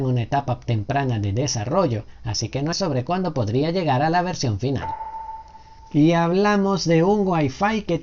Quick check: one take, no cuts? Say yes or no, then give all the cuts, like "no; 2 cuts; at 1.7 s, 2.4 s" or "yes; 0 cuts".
no; 1 cut; at 2.7 s